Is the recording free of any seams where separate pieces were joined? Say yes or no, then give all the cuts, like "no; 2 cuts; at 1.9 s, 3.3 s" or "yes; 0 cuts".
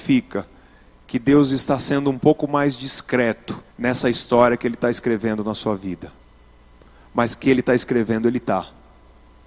no; 1 cut; at 3.7 s